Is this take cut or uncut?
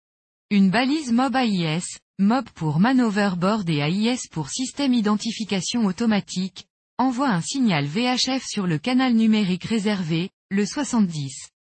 uncut